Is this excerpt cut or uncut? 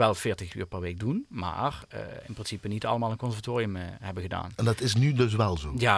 uncut